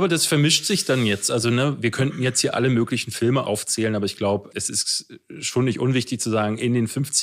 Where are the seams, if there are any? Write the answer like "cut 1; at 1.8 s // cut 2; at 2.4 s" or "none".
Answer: none